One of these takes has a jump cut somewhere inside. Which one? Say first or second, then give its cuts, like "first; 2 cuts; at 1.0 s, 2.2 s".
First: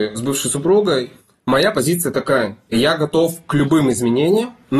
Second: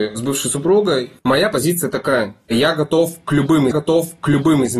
second; 2 cuts; at 1.2 s, 3.7 s